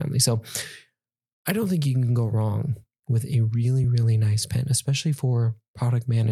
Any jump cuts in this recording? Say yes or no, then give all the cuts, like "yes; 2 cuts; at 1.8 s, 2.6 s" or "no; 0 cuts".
no; 0 cuts